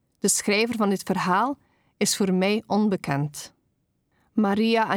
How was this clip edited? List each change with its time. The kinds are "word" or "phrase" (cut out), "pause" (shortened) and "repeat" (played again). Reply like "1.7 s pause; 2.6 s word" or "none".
none